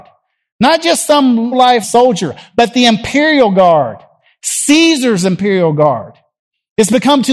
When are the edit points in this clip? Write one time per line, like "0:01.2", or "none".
0:01.5
0:01.8